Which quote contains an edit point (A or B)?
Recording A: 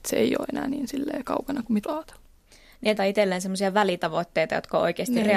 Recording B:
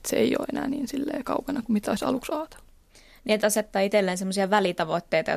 A